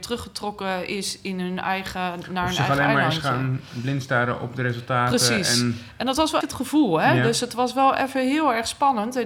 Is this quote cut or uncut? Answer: cut